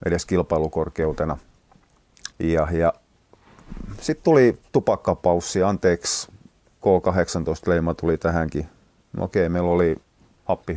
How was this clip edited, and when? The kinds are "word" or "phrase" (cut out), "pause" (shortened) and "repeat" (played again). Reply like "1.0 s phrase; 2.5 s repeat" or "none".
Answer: 2.3 s pause